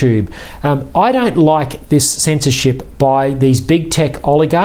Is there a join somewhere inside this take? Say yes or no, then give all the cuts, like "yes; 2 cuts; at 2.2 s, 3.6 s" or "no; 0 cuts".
no; 0 cuts